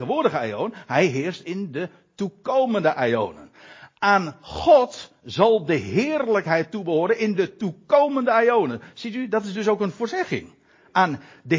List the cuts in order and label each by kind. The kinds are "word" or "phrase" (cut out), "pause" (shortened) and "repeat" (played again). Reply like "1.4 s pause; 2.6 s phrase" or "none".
none